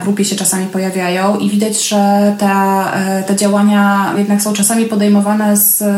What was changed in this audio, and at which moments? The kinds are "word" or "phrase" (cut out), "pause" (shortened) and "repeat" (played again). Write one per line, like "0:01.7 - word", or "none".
0:04.1 - word